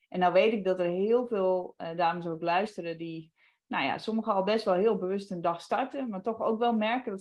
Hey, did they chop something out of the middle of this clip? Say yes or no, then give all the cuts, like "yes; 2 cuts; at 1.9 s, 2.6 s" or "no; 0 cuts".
no; 0 cuts